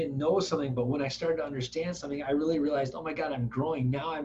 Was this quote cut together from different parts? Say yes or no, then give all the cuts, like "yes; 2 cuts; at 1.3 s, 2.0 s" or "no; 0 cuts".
no; 0 cuts